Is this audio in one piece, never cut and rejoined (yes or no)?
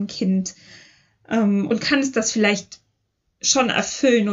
no